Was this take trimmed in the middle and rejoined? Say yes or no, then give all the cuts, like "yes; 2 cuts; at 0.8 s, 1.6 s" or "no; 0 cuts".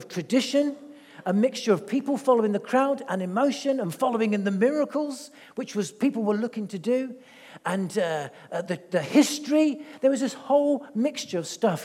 no; 0 cuts